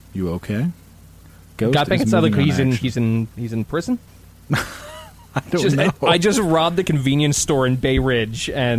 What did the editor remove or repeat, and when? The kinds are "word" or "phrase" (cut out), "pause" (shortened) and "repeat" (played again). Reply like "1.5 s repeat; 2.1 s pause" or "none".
4.1 s pause